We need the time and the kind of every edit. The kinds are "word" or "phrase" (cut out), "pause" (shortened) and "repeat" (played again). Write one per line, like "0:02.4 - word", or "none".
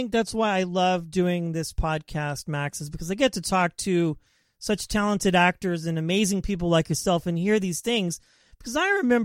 none